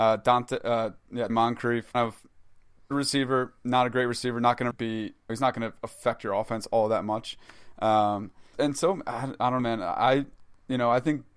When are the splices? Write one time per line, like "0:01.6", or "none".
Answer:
0:01.3
0:01.9
0:02.9
0:04.7
0:05.3
0:08.5
0:09.6